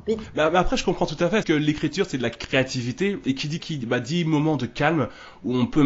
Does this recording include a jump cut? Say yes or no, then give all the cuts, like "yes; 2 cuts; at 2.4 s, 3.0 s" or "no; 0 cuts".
yes; 2 cuts; at 1.4 s, 3.6 s